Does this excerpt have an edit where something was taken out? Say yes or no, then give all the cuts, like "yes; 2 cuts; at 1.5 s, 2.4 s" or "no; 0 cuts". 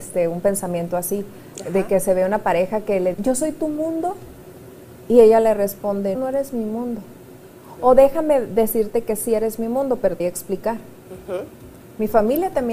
yes; 3 cuts; at 3.1 s, 6.1 s, 10.2 s